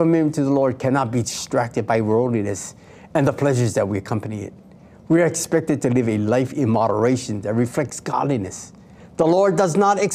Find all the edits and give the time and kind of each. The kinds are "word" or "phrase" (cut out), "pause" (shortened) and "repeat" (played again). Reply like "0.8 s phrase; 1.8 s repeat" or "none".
none